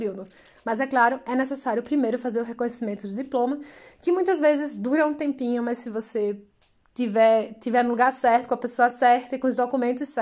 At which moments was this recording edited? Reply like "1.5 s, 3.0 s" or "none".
none